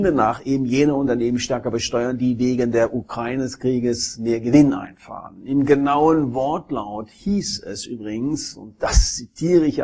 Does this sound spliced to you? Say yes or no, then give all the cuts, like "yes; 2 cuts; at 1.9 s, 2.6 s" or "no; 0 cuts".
no; 0 cuts